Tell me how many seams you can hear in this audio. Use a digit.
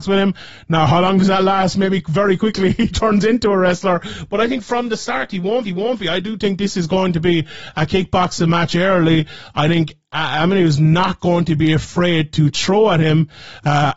1